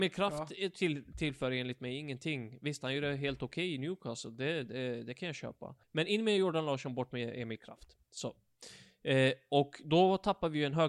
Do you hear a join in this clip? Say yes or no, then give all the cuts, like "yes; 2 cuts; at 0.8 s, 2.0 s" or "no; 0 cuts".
yes; 2 cuts; at 5.8 s, 8.0 s